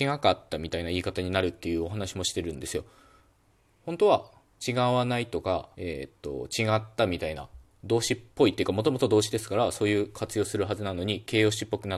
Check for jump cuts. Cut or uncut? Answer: cut